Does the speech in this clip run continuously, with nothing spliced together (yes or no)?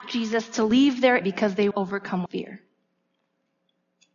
no